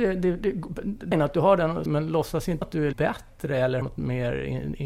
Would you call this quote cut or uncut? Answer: cut